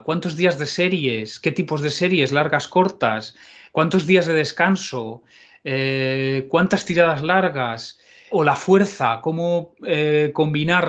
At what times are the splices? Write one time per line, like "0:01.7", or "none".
0:08.3